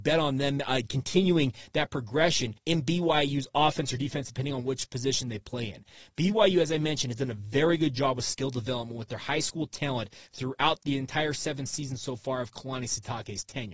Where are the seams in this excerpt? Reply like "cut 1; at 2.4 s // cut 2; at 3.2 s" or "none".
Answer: cut 1; at 2.6 s